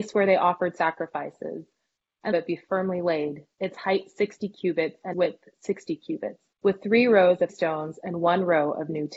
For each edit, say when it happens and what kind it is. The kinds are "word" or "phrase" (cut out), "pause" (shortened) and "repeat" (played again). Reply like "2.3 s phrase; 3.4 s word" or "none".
2.3 s phrase; 3.5 s pause; 5.1 s word; 6.5 s pause; 7.5 s word